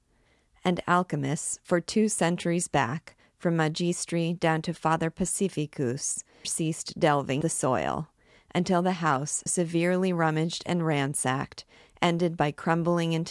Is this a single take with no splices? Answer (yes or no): no